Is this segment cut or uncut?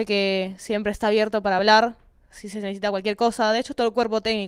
uncut